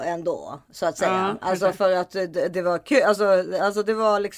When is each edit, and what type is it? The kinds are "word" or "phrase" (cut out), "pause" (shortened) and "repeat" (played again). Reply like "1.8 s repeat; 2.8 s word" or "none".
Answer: none